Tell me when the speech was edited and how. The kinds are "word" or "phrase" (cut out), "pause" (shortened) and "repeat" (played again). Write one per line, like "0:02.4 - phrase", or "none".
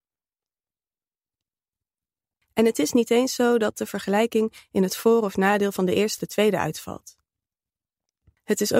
0:06.2 - word